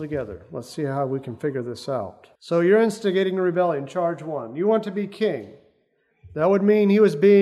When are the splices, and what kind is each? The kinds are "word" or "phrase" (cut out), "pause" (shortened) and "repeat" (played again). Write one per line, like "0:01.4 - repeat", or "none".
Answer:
0:02.4 - pause